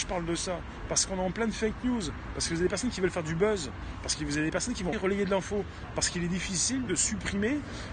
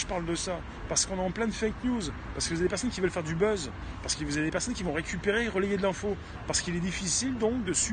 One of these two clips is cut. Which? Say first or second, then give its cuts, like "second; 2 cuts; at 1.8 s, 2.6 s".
first; 2 cuts; at 4.9 s, 6.9 s